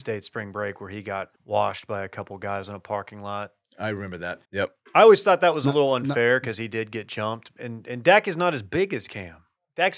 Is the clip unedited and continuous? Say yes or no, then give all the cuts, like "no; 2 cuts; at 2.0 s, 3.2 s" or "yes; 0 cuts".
no; 2 cuts; at 1.4 s, 4.4 s